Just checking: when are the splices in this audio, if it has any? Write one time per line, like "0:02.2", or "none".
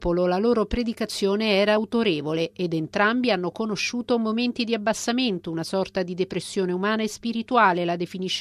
none